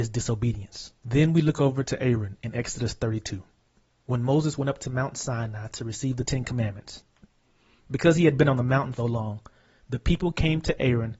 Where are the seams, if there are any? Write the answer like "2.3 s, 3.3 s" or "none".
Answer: 1.0 s, 9.0 s